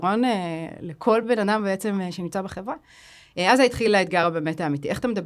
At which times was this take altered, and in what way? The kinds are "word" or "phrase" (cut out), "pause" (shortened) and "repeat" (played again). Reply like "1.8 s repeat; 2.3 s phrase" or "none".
none